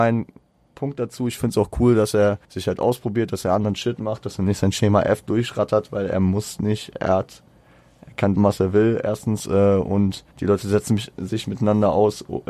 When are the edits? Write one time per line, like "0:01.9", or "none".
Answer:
0:02.4
0:08.4
0:10.3